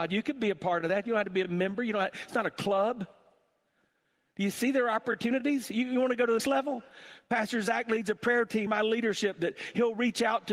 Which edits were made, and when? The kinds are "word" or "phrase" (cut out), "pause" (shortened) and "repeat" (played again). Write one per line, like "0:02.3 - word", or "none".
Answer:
0:06.4 - word
0:08.7 - word